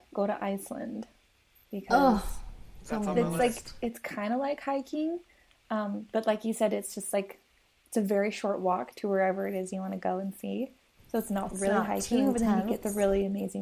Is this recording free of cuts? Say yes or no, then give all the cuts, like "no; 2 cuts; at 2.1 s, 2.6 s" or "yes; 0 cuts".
yes; 0 cuts